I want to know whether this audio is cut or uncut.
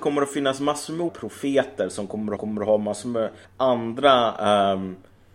cut